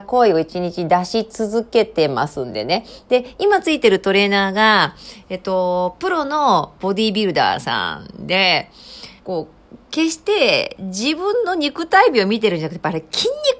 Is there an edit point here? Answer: yes; 1 cut; at 9.2 s

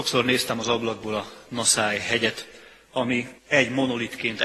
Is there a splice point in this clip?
yes; 1 cut; at 3.4 s

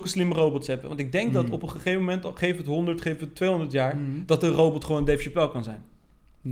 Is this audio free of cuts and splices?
yes; 0 cuts

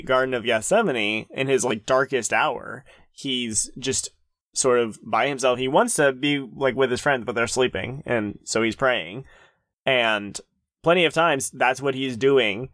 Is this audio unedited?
yes; 0 cuts

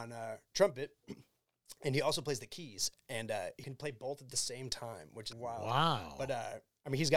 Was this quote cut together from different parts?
yes; 2 cuts; at 3.6 s, 5.3 s

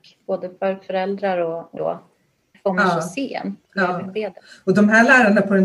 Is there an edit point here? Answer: yes; 3 cuts; at 1.8 s, 2.5 s, 3.7 s

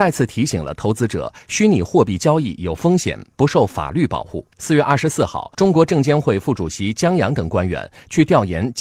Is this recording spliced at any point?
yes; 2 cuts; at 4.5 s, 5.5 s

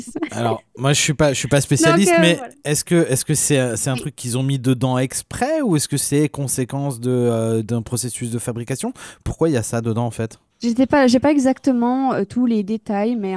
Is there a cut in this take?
yes; 1 cut; at 10.5 s

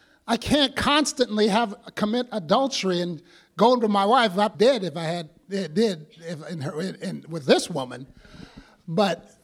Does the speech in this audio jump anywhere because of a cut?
yes; 1 cut; at 4.5 s

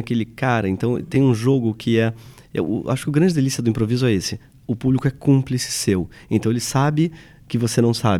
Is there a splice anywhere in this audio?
no; 0 cuts

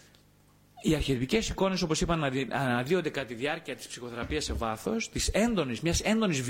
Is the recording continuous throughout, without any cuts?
yes; 0 cuts

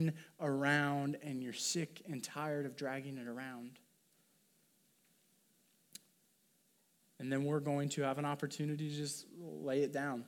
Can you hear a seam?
no; 0 cuts

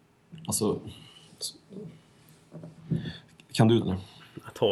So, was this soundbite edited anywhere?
yes; 1 cut; at 3.8 s

